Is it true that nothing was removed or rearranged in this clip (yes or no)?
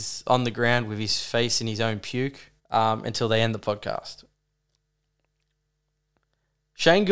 no